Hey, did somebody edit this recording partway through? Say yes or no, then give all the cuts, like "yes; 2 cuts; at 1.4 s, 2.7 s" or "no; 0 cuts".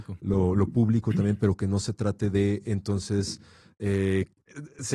no; 0 cuts